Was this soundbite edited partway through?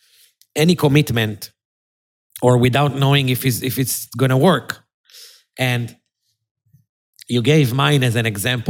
no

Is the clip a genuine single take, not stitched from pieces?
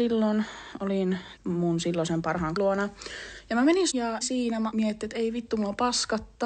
no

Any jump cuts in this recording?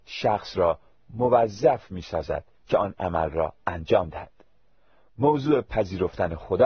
no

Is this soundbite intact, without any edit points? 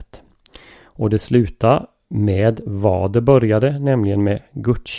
yes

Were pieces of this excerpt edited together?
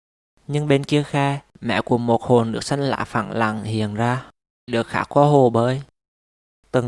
yes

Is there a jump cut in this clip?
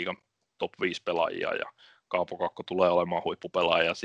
no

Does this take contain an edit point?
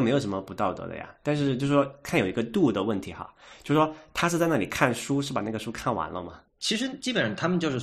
yes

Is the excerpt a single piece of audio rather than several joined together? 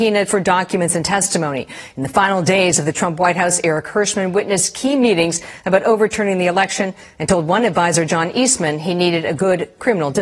yes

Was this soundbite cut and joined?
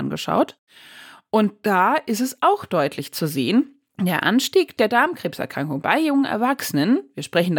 no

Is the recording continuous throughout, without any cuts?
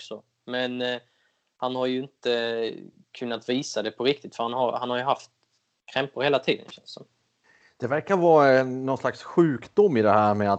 yes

